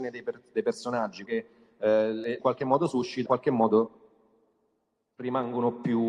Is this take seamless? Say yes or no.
no